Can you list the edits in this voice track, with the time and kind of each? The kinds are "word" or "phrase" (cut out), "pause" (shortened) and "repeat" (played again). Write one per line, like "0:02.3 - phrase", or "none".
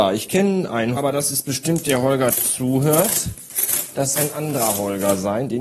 0:01.0 - word
0:01.8 - word
0:02.3 - word
0:04.2 - word